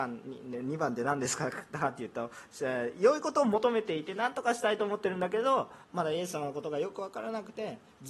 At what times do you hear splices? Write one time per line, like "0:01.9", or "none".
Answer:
0:05.8